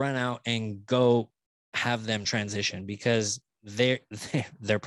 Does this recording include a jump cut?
no; 0 cuts

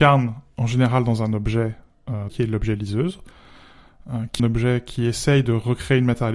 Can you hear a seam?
yes; 2 cuts; at 2.3 s, 4.4 s

